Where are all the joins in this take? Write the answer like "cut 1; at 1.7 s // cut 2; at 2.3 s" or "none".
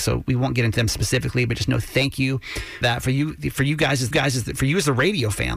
cut 1; at 2.8 s // cut 2; at 4.1 s